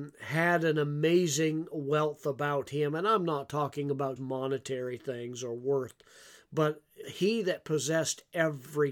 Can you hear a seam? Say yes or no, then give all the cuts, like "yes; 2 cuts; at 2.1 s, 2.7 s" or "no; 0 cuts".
yes; 2 cuts; at 4.2 s, 7.0 s